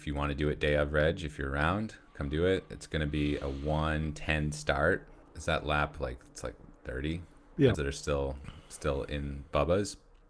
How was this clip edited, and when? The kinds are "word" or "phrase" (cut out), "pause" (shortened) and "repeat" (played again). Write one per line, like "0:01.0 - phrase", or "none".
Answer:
0:05.2 - pause
0:07.7 - phrase